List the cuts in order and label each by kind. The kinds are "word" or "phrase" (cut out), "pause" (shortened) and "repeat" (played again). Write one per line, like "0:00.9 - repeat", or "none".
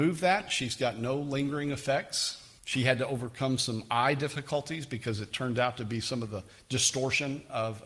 0:02.6 - pause